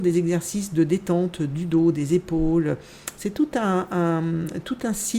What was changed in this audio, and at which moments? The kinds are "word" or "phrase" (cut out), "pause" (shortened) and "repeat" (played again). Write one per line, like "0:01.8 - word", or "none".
none